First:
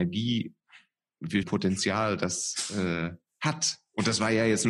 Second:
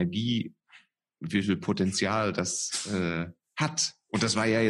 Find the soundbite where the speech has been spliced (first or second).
first